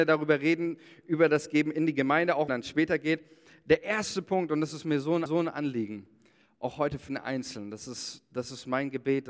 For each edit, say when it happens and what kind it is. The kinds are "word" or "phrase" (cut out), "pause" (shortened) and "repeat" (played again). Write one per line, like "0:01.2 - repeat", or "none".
0:02.5 - phrase
0:05.3 - repeat
0:07.1 - word